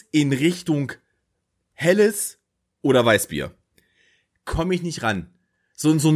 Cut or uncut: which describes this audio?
uncut